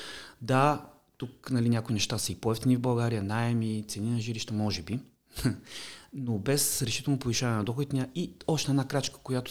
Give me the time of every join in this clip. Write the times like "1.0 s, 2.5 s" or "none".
none